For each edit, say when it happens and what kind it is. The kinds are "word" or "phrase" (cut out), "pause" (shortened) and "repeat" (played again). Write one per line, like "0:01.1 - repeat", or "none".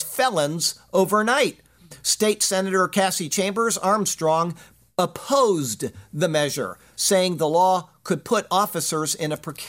none